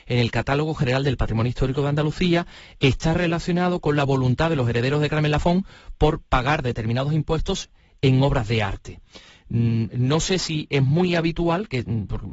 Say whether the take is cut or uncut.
uncut